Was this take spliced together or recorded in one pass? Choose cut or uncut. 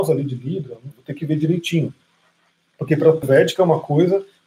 cut